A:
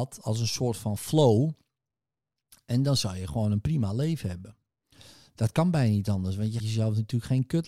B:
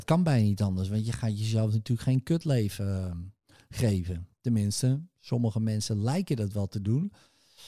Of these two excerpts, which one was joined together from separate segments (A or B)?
A